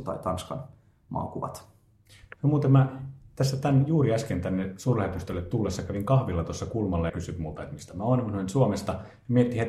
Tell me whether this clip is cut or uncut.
cut